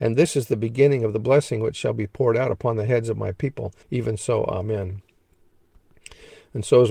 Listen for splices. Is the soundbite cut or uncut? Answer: cut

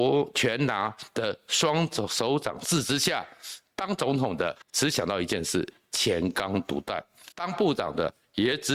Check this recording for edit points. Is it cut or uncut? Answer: cut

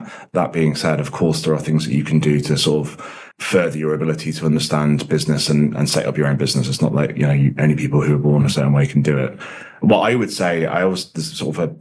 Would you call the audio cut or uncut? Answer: cut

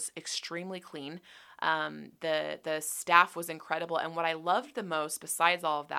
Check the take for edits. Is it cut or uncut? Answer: uncut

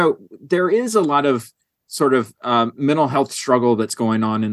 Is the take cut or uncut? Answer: uncut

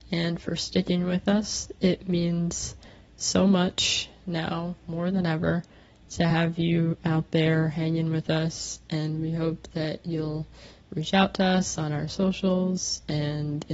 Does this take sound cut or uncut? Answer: uncut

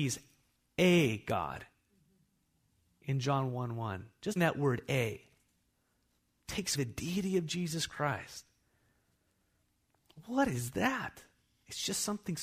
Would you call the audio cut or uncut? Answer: cut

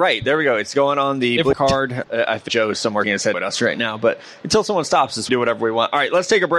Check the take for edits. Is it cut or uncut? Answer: cut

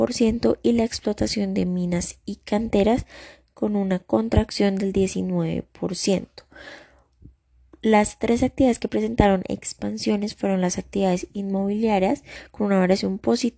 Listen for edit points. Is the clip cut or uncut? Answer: uncut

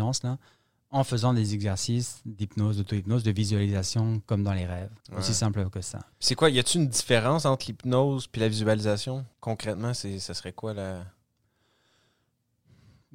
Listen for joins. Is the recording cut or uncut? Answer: cut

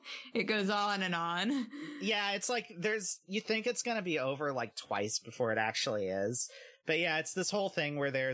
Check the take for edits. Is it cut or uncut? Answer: uncut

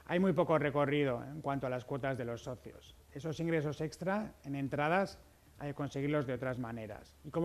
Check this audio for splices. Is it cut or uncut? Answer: uncut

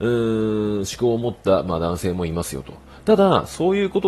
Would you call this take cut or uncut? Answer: uncut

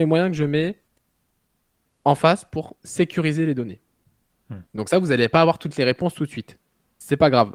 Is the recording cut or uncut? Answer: cut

